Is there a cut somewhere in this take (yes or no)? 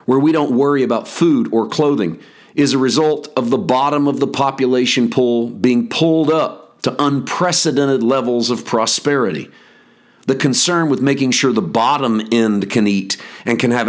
no